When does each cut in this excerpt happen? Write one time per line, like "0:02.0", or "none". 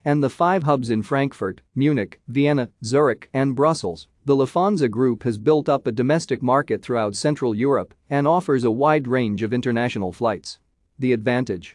none

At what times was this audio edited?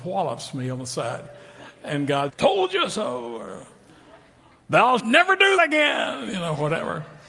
0:02.3
0:05.0
0:05.6

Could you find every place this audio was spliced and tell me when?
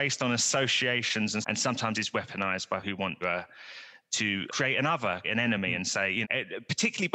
0:01.4
0:01.9
0:02.8
0:03.2
0:04.5
0:05.2
0:06.2

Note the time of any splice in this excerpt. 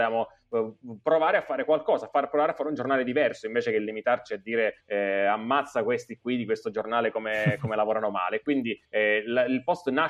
0:04.8
0:08.8

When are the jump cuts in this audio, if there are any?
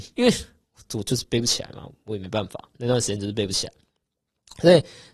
none

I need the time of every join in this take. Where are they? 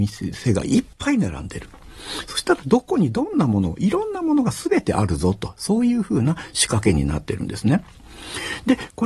0:00.9

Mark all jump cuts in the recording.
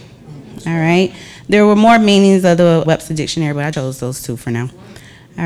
0:02.8
0:03.7

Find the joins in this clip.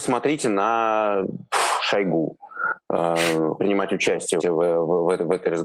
0:03.6
0:04.4

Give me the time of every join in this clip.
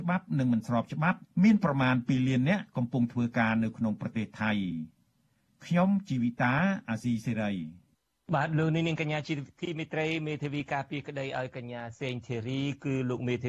0:08.2

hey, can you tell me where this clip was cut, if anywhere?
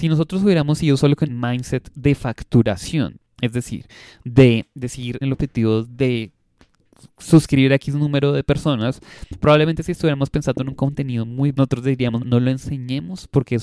0:01.3
0:05.2
0:11.5
0:12.2

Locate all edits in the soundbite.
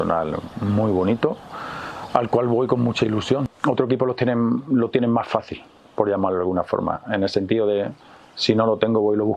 none

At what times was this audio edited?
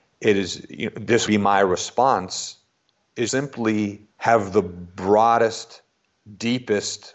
0:01.3
0:03.3
0:04.1

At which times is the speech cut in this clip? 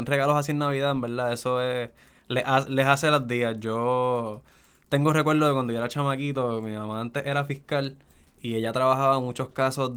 0:02.7

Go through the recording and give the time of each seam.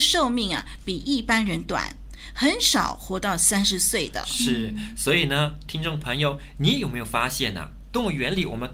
none

